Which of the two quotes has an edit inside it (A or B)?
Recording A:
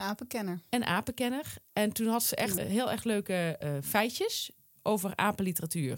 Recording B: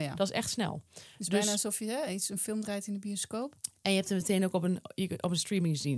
A